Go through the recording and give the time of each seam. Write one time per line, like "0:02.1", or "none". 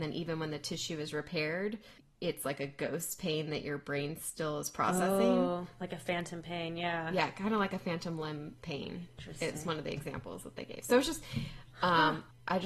none